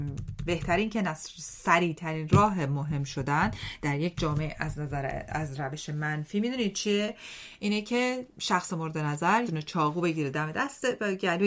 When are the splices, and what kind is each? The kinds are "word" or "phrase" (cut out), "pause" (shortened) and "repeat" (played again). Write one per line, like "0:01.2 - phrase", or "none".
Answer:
0:09.4 - word

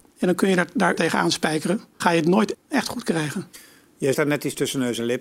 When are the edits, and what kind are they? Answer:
0:01.0 - word
0:02.0 - word
0:02.5 - word
0:04.1 - word

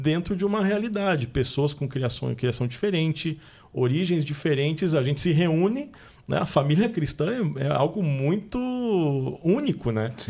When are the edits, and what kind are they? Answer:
none

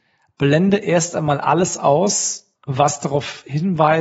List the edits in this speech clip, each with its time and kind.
0:02.5 - pause

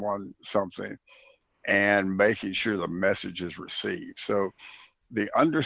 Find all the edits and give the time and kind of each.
none

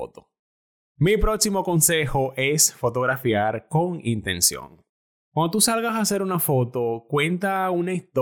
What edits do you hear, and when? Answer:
none

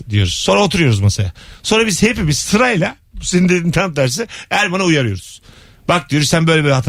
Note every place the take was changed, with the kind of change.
none

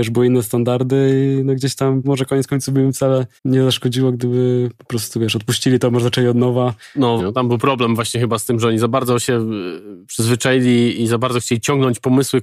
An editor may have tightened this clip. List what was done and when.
0:02.0 - word
0:03.4 - pause
0:07.2 - word

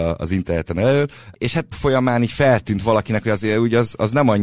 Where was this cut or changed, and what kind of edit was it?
0:01.7 - phrase

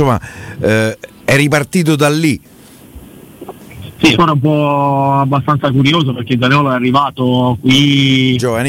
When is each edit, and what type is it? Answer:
0:04.1 - word

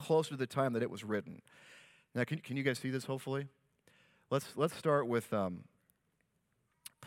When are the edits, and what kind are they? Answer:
none

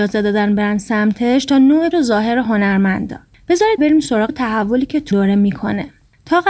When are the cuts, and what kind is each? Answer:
0:01.9 - word
0:03.8 - word
0:04.3 - word
0:05.1 - word

